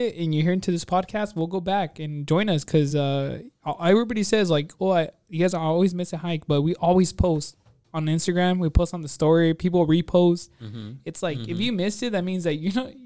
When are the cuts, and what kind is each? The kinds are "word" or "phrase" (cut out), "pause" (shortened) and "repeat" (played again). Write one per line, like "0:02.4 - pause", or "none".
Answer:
none